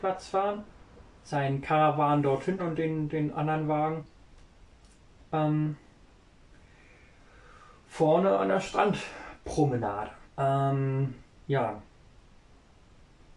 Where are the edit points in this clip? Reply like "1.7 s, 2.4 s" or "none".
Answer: 2.6 s, 10.2 s